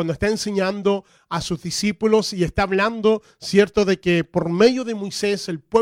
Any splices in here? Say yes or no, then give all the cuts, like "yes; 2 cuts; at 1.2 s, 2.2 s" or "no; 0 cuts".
no; 0 cuts